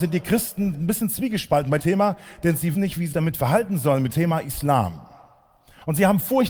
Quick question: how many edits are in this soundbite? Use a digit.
4